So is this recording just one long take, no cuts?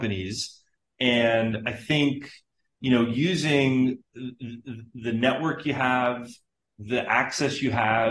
yes; 0 cuts

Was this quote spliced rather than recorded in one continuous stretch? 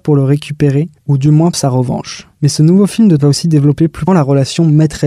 yes; 4 cuts; at 1.5 s, 2.3 s, 3.2 s, 4.1 s

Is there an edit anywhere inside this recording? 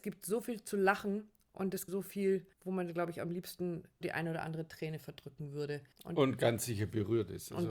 yes; 4 cuts; at 1.9 s, 2.5 s, 4.0 s, 5.9 s

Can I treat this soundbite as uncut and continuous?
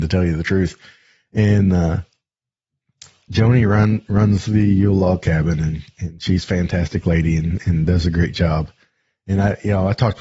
yes; 0 cuts

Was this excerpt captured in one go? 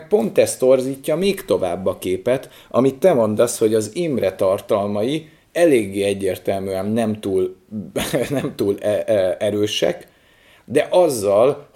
yes; 0 cuts

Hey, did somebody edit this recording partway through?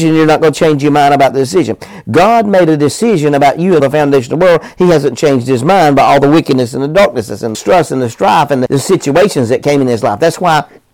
yes; 3 cuts; at 3.8 s, 7.5 s, 8.7 s

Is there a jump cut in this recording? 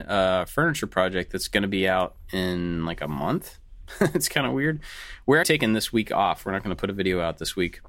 yes; 1 cut; at 5.4 s

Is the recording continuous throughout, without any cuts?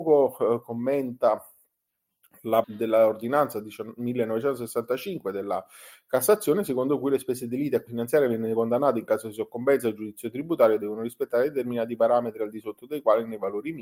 no; 2 cuts; at 2.6 s, 7.9 s

